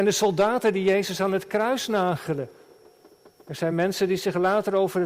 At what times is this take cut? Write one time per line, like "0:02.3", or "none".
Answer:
none